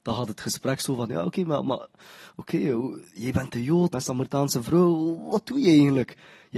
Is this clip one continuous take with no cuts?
no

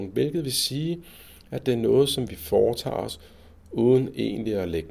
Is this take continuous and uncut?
yes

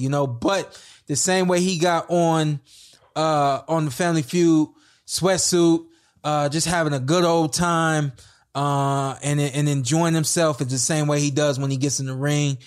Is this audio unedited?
yes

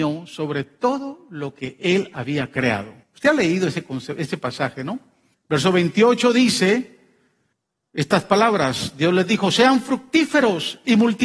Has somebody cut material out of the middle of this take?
yes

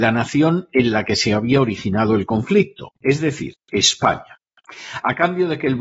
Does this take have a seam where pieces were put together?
yes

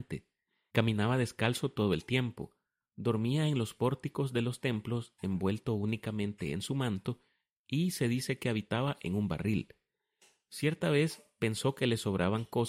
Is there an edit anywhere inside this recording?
no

